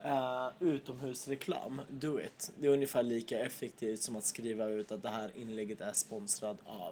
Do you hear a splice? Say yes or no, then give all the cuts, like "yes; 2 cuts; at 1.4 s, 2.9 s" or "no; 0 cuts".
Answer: no; 0 cuts